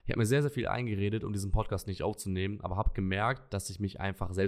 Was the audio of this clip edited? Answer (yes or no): no